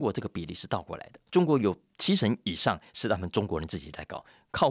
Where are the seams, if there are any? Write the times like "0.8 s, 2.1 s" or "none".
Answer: 1.3 s